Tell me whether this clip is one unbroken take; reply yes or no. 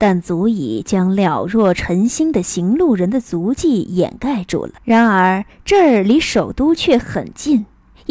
no